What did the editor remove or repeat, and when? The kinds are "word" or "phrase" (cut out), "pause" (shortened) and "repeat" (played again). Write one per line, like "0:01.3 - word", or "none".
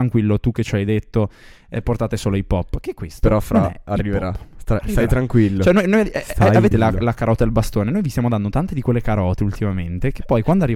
0:06.7 - word